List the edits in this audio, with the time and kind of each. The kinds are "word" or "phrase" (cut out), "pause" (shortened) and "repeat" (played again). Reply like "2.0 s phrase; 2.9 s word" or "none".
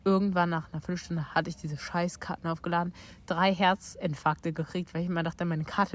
none